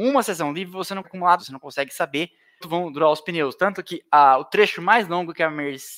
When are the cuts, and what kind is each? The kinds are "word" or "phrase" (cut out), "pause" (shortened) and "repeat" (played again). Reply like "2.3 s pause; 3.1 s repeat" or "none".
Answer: 1.0 s word; 1.4 s word; 2.6 s phrase